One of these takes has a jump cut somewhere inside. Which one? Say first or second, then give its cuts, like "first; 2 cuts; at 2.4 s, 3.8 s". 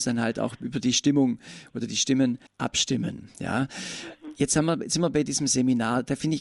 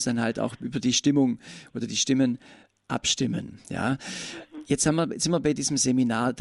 first; 1 cut; at 2.5 s